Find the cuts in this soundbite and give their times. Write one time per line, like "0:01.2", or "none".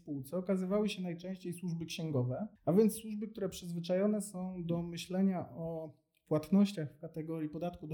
0:02.6